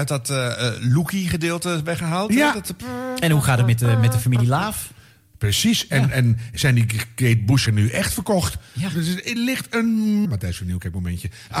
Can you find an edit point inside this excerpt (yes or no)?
yes